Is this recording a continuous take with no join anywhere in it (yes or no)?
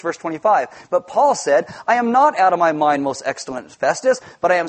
yes